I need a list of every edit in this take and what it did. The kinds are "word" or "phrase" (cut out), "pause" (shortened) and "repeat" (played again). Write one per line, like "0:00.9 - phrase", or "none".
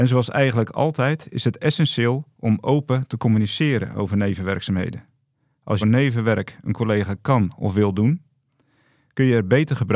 0:05.8 - phrase